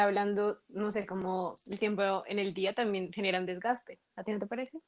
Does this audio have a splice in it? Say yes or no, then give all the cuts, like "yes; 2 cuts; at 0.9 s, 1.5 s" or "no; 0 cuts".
yes; 1 cut; at 1.7 s